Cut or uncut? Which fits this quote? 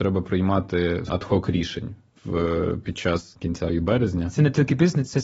cut